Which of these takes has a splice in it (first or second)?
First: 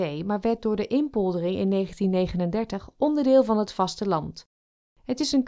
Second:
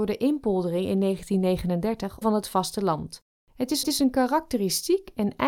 second